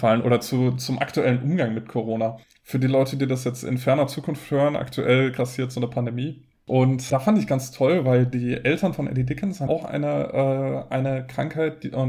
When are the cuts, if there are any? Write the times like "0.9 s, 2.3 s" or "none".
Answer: 2.4 s, 7.1 s, 9.7 s